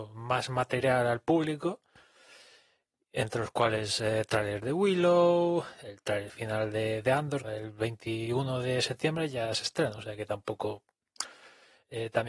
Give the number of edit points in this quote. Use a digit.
1